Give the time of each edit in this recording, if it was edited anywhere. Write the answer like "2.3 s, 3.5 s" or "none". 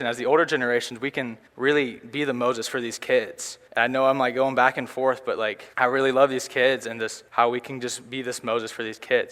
1.5 s, 3.7 s, 5.7 s, 7.3 s

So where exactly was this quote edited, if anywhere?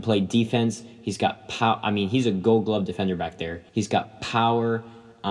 3.7 s

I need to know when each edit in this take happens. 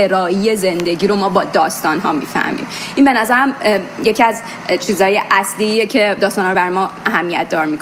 none

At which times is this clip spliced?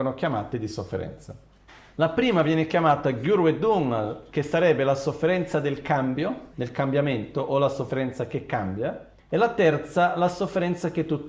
1.7 s, 6.5 s, 9.2 s

